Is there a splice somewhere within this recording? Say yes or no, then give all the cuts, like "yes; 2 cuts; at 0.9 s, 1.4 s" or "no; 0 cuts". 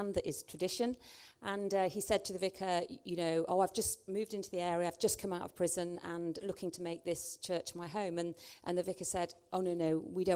no; 0 cuts